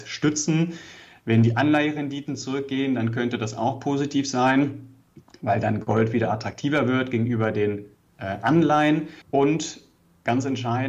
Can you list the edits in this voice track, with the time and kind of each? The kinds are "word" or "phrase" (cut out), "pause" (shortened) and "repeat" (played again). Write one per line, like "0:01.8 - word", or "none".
0:09.2 - pause